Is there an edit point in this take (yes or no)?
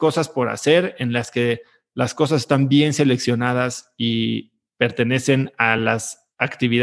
no